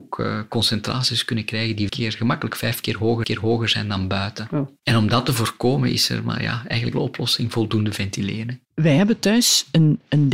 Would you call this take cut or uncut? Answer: cut